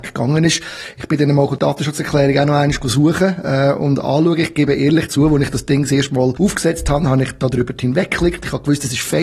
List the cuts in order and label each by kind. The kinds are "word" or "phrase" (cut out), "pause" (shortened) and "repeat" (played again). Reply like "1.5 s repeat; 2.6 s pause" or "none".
none

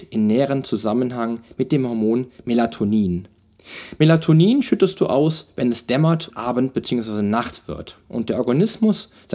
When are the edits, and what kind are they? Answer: 6.3 s word

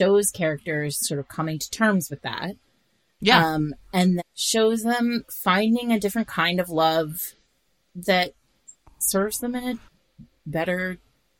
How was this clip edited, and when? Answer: 4.2 s word; 5.3 s word

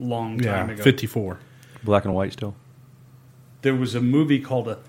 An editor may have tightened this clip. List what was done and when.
none

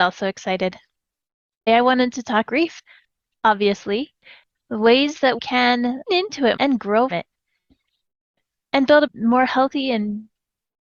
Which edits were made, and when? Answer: 1.7 s word; 2.5 s word; 4.5 s word; 5.4 s word; 6.1 s word; 6.6 s word; 7.1 s word; 9.1 s word

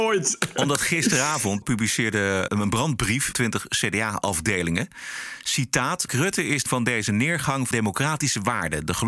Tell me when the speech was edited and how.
1.6 s word; 2.5 s word; 3.3 s word; 6.1 s word; 6.7 s word; 7.7 s word

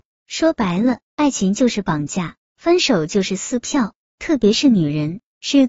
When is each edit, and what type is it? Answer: 1.0 s pause

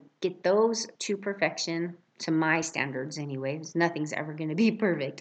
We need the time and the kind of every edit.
none

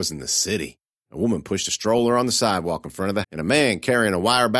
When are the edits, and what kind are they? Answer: 1.0 s pause; 3.2 s word

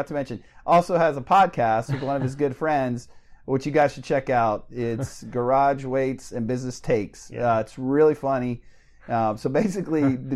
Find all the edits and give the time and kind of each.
none

